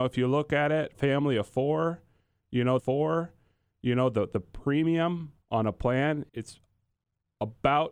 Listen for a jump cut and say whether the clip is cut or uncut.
cut